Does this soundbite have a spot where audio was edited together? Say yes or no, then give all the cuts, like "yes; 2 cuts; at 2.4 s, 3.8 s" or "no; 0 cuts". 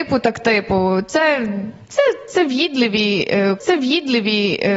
yes; 1 cut; at 3.6 s